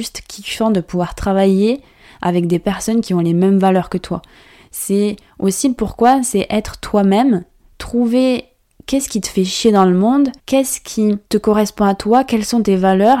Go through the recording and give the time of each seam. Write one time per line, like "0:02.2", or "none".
0:10.4
0:11.2